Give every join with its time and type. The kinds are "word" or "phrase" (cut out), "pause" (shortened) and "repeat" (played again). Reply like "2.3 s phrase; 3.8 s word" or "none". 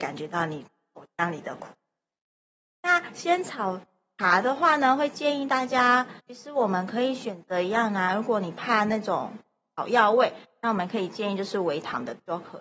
6.2 s pause